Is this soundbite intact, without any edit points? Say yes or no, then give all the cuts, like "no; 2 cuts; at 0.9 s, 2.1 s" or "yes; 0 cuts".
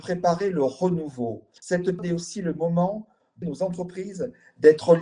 no; 2 cuts; at 2.0 s, 3.4 s